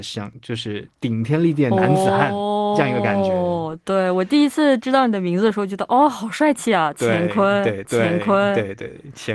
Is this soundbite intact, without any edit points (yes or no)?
no